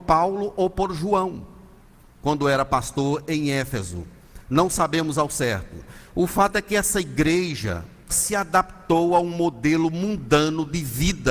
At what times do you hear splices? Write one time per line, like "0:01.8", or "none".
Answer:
0:08.1